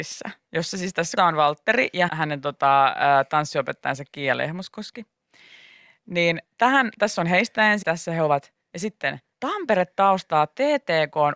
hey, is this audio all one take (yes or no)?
no